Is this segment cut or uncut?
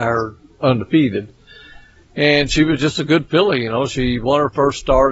uncut